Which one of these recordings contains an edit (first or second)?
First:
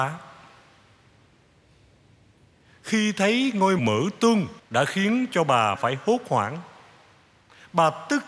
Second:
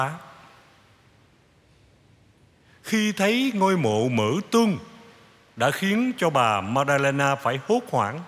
first